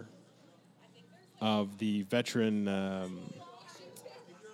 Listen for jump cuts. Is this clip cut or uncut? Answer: uncut